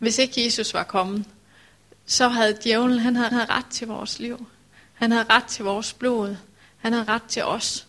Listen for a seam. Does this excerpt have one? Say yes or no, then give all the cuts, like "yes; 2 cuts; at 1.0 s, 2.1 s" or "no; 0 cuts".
yes; 1 cut; at 3.3 s